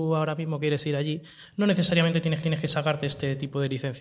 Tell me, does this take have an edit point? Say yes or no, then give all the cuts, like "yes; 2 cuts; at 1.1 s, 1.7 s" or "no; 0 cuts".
yes; 1 cut; at 2.4 s